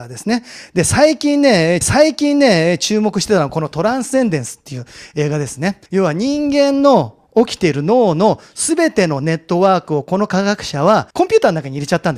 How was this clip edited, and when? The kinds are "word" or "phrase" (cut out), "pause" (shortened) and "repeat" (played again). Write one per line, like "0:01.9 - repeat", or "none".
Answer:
0:01.8 - repeat
0:05.9 - pause
0:11.1 - pause